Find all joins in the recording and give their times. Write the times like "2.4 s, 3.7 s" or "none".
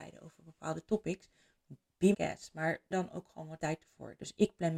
2.1 s, 2.9 s, 3.6 s